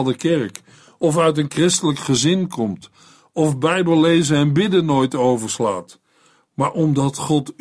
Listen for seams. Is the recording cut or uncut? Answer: uncut